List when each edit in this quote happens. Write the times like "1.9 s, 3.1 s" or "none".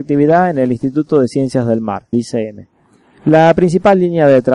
2.1 s